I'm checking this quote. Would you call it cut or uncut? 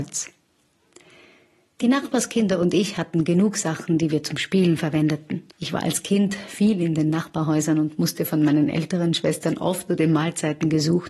cut